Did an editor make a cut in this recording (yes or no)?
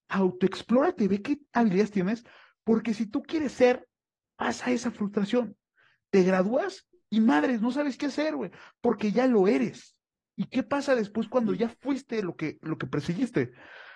no